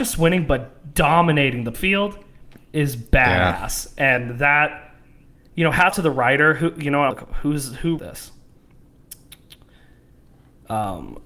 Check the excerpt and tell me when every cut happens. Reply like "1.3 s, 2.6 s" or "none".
1.7 s, 5.9 s, 7.1 s, 8.0 s